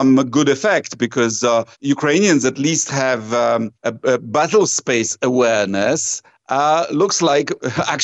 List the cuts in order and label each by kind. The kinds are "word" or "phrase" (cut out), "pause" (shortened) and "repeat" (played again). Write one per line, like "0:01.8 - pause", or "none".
0:01.7 - pause
0:03.7 - pause